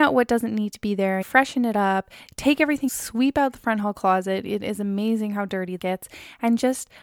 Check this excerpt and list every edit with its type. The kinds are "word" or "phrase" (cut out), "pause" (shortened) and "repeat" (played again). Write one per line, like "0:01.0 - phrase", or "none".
0:01.2 - word
0:02.9 - word
0:05.8 - word